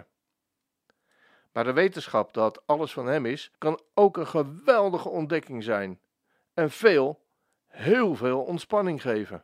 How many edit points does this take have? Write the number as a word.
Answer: one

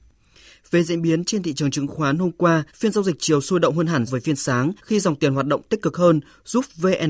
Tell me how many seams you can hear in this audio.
three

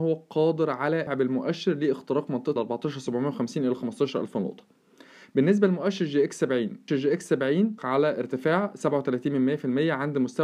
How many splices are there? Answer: four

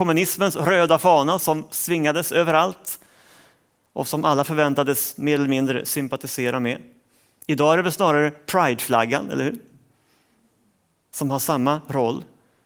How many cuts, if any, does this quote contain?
zero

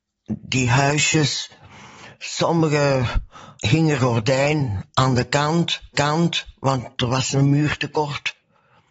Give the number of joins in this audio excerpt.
three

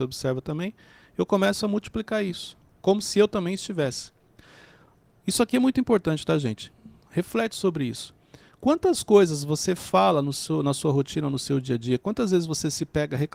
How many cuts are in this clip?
zero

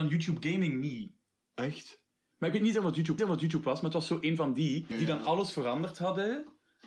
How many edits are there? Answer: three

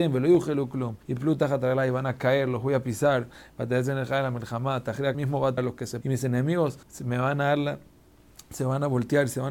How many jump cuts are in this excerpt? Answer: five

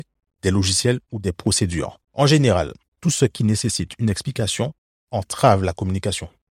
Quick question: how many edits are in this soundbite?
two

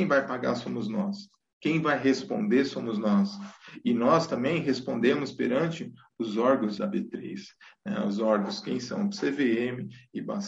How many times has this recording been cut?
one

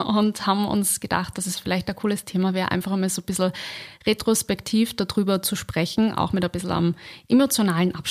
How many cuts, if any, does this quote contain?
zero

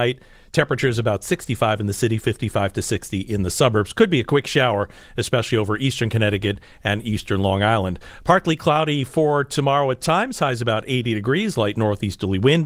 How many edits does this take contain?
zero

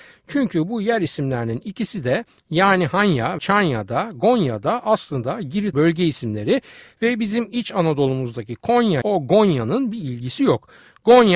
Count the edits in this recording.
three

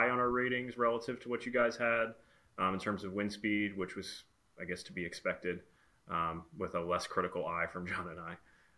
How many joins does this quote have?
zero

